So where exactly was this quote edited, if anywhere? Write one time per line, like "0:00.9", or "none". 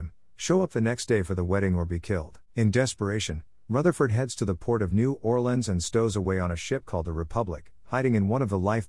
0:02.5